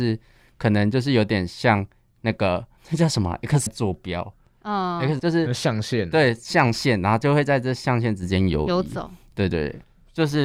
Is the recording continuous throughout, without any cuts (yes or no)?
no